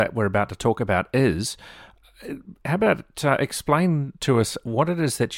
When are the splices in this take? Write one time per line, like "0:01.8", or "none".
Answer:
none

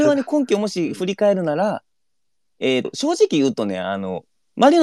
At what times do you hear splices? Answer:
0:02.8

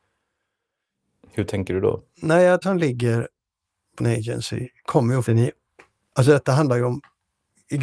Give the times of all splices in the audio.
0:02.6
0:04.0
0:05.3

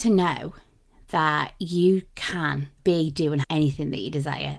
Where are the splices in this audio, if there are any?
0:02.8
0:03.4

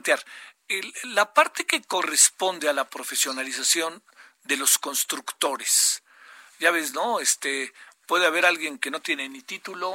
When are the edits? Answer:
none

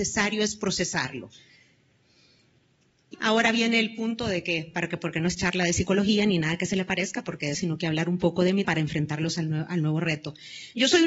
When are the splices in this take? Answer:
0:03.1
0:07.5
0:08.6

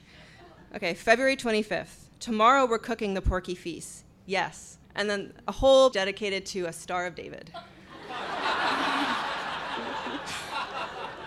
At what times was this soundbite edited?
0:04.8
0:05.9

